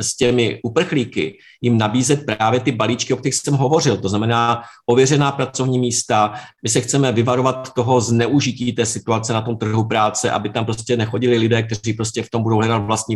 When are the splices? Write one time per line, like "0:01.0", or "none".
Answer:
none